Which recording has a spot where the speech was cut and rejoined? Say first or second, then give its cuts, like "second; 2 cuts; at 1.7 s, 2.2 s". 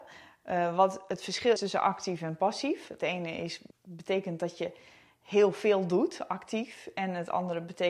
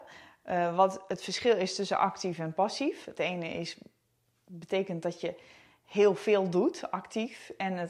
first; 2 cuts; at 1.6 s, 3.7 s